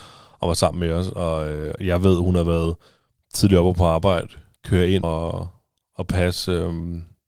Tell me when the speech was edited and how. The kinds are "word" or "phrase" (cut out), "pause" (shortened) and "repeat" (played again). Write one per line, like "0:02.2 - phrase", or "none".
0:05.0 - word